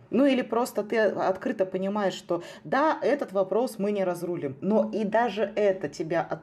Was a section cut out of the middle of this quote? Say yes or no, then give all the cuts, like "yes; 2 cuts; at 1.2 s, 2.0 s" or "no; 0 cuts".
no; 0 cuts